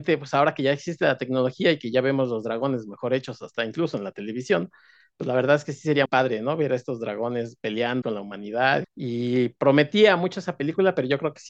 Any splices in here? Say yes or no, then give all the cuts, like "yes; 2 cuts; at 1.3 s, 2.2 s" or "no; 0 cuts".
yes; 3 cuts; at 6.1 s, 8.0 s, 8.8 s